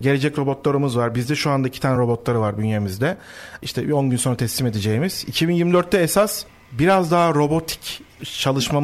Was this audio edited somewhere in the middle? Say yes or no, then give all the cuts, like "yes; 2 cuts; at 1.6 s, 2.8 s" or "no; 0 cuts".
no; 0 cuts